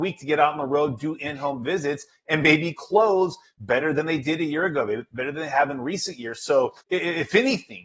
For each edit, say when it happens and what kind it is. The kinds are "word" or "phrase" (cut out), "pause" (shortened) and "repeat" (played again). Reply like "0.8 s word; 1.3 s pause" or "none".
6.8 s pause